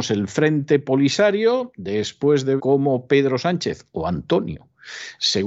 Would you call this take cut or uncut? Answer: cut